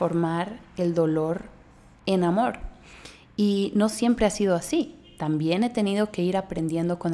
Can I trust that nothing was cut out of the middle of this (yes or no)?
yes